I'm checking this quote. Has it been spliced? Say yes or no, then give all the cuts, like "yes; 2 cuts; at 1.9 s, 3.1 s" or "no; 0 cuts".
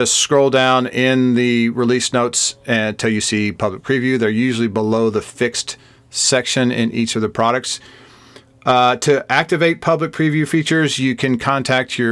no; 0 cuts